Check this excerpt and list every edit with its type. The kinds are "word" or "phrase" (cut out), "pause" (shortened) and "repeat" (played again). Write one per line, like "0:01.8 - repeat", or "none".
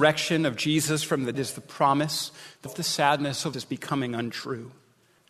0:01.3 - word
0:02.7 - word
0:03.5 - word